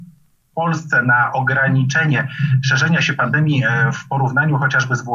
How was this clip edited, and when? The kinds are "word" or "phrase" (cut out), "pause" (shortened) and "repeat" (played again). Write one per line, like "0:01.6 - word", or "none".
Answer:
none